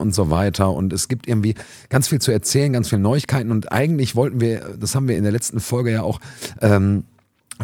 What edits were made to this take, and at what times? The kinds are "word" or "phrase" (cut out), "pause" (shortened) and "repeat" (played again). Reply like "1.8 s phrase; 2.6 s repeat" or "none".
none